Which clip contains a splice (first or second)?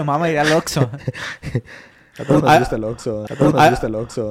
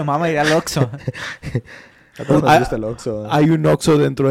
first